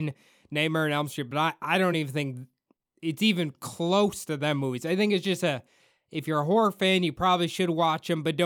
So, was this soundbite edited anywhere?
no; 0 cuts

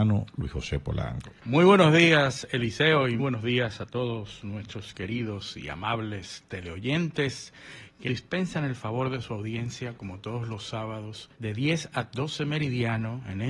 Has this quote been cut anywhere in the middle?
yes; 4 cuts; at 1.4 s, 3.2 s, 8.1 s, 11.3 s

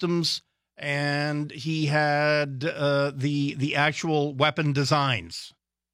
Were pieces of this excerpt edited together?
no; 0 cuts

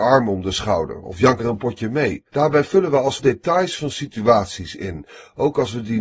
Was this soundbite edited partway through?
yes; 3 cuts; at 1.4 s, 2.3 s, 3.2 s

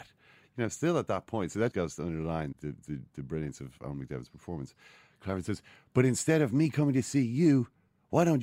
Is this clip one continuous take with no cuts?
no; 2 cuts; at 1.7 s, 2.5 s

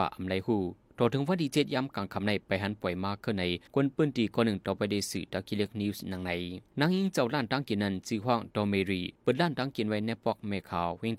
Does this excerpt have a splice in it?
yes; 3 cuts; at 3.7 s, 6.7 s, 9.1 s

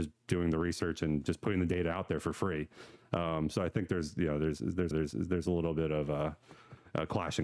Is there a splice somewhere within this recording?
yes; 1 cut; at 4.9 s

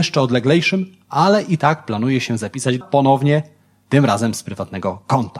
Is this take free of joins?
no; 1 cut; at 2.8 s

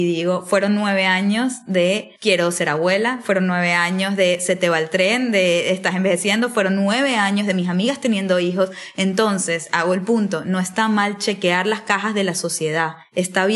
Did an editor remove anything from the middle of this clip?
no; 0 cuts

